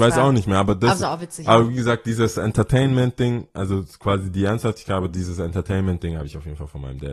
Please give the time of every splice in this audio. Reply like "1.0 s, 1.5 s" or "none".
none

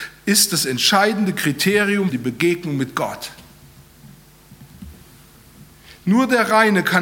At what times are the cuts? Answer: 2.1 s

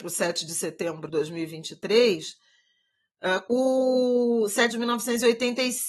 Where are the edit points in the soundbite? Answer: 1.1 s, 3.5 s, 4.7 s

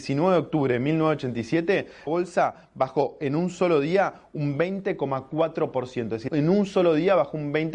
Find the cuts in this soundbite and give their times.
2.1 s, 6.3 s

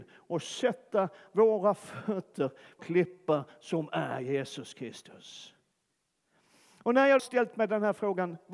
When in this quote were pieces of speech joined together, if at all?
2.8 s, 7.2 s

